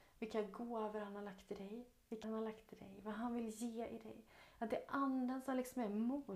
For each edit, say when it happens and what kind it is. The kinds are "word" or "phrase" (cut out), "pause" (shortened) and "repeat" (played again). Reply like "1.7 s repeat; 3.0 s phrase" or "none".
2.2 s word